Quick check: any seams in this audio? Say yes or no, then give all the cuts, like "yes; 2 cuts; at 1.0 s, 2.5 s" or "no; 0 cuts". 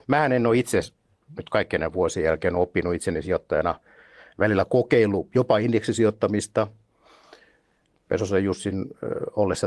no; 0 cuts